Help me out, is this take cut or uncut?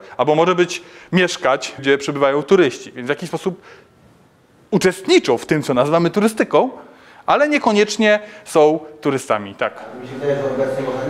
cut